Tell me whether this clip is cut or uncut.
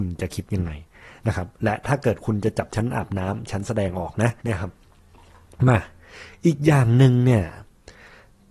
cut